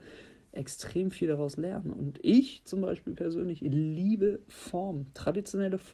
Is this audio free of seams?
yes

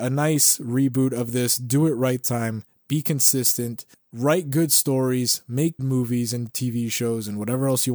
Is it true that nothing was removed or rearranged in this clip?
no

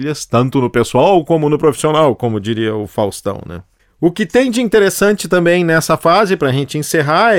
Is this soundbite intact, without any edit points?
yes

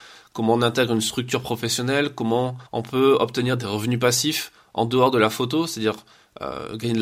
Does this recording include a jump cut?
yes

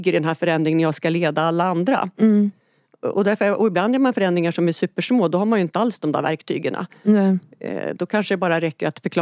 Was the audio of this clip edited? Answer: no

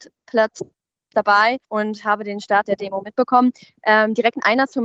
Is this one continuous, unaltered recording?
no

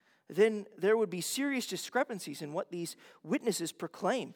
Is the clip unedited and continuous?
yes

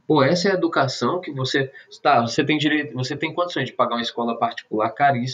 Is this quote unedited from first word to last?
yes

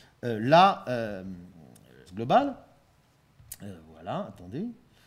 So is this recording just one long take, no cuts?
no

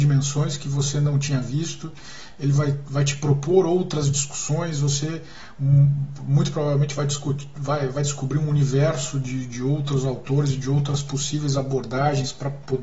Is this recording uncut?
yes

